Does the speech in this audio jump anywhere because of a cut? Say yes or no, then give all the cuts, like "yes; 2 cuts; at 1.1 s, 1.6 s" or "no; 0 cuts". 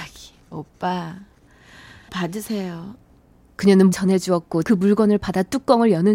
yes; 3 cuts; at 2.1 s, 3.9 s, 4.6 s